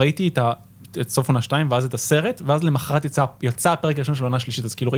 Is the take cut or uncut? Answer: uncut